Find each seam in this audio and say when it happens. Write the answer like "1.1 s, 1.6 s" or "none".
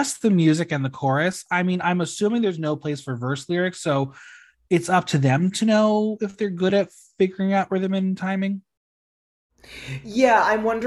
none